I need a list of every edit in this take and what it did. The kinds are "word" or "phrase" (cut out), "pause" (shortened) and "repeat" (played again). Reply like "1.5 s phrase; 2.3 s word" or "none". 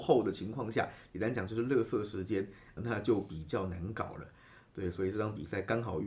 2.8 s word